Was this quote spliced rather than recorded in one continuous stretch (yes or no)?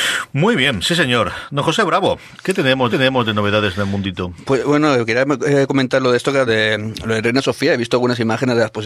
yes